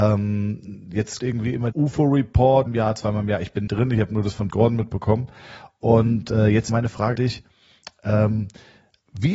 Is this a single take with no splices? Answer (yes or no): no